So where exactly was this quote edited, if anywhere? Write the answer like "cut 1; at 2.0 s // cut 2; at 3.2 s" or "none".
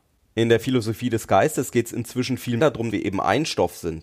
cut 1; at 2.6 s // cut 2; at 2.9 s